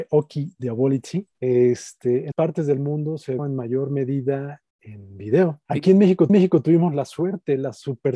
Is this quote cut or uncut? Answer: cut